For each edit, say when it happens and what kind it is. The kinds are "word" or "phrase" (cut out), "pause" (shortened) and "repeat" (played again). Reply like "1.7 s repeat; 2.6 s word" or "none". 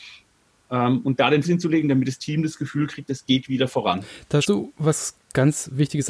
1.4 s word; 4.4 s word